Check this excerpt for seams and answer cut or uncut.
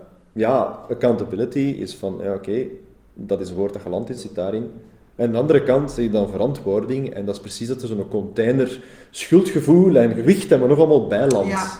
cut